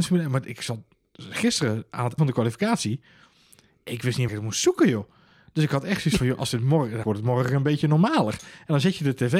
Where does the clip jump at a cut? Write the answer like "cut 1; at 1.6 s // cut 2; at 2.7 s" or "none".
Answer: cut 1; at 2.2 s // cut 2; at 4.3 s // cut 3; at 7.0 s